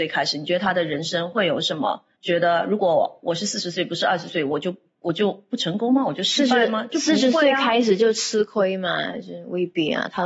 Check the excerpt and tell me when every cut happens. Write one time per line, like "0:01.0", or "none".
0:02.1